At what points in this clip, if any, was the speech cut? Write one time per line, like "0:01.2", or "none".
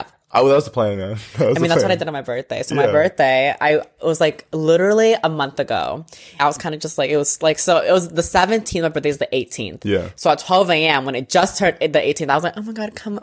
0:06.4